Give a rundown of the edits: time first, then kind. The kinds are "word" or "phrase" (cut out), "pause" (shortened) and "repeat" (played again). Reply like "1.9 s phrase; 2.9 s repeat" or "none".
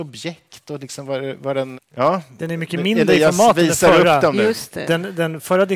1.7 s word